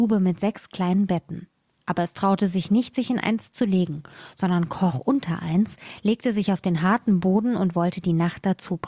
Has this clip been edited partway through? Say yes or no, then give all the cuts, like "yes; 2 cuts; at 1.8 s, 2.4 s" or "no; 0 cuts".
no; 0 cuts